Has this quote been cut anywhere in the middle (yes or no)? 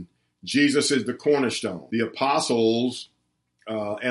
yes